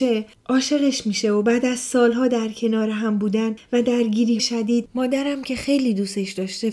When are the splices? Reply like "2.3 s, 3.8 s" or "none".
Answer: 4.4 s